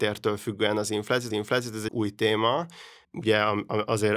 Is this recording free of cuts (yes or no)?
no